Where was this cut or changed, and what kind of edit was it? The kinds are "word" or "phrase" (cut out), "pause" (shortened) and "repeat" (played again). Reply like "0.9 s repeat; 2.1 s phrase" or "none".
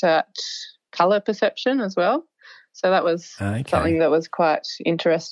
none

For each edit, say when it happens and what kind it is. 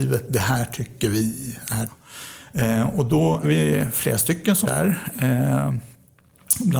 1.9 s word; 3.4 s word; 4.6 s word

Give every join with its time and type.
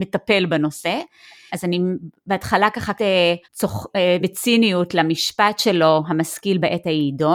1.5 s word; 2.9 s word; 3.4 s pause; 4.2 s word

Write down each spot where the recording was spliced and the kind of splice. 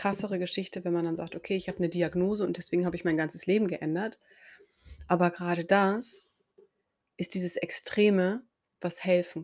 none

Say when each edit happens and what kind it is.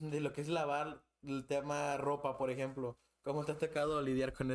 none

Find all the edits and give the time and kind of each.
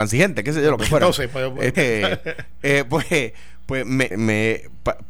1.7 s word; 4.1 s word

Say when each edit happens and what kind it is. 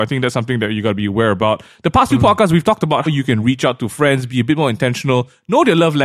3.1 s word

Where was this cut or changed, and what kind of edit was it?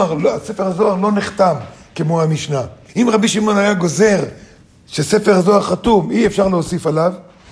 2.9 s pause

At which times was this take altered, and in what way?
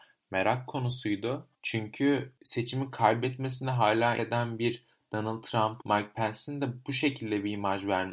4.2 s word; 5.8 s word

